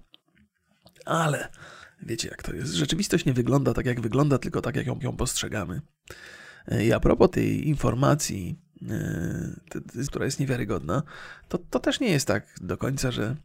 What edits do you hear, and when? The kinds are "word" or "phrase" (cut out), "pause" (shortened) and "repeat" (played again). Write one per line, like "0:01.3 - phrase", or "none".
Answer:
0:05.0 - repeat
0:07.3 - word
0:10.1 - word